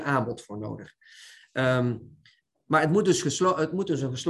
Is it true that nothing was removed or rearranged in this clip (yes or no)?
yes